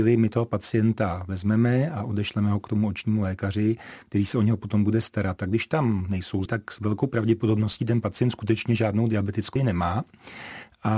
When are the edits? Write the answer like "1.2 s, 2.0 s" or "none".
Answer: 6.5 s, 9.6 s